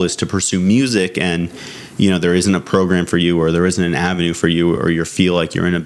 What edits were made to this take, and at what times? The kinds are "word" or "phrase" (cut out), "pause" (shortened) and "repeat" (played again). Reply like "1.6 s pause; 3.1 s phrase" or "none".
none